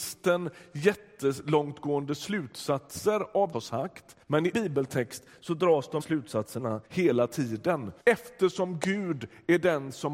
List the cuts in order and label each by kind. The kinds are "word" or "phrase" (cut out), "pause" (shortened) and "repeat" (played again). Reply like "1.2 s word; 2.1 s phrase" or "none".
3.5 s phrase; 4.2 s pause; 4.5 s word; 6.0 s word; 6.9 s pause; 8.0 s pause